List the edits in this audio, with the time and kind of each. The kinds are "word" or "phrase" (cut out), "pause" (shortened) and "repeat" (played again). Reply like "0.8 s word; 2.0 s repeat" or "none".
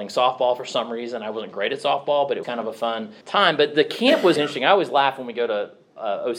2.4 s phrase; 3.2 s pause; 4.4 s word